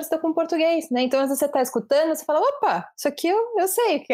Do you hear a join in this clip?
no; 0 cuts

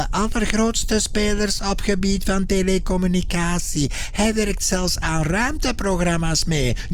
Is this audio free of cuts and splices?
yes; 0 cuts

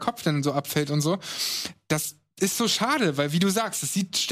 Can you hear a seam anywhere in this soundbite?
no; 0 cuts

